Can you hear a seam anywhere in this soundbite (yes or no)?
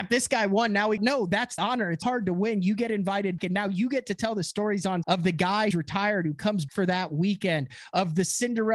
yes